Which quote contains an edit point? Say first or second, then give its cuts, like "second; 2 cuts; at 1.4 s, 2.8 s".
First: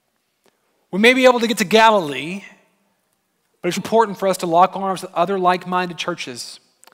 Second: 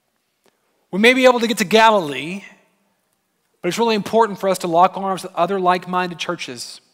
first; 1 cut; at 3.8 s